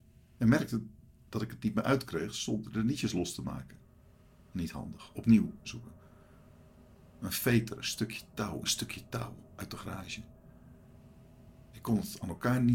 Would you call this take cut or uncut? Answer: cut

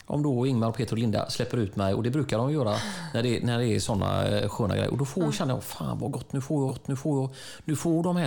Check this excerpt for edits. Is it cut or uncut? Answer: cut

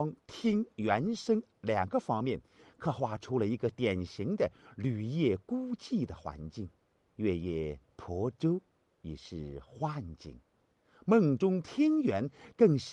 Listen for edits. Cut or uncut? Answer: cut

